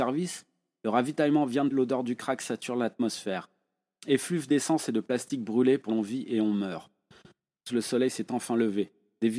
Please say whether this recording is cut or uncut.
cut